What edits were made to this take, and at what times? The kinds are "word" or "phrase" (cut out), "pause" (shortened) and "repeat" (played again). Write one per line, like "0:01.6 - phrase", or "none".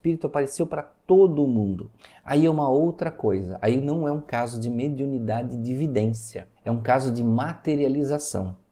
0:02.0 - pause
0:06.6 - pause